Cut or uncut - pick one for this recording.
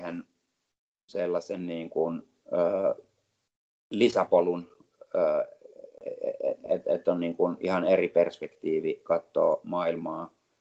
uncut